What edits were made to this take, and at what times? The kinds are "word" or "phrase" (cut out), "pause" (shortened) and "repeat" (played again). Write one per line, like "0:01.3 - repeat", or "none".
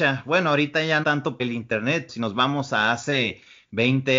0:01.0 - word
0:01.4 - word
0:02.1 - word